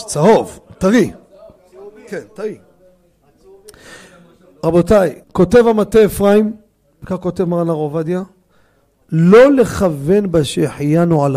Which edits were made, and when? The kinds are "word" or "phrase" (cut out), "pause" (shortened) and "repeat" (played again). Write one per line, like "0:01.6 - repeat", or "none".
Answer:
0:05.2 - pause